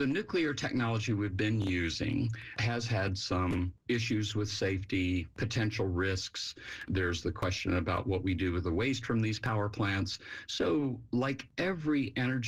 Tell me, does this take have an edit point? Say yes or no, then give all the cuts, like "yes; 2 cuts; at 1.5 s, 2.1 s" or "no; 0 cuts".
no; 0 cuts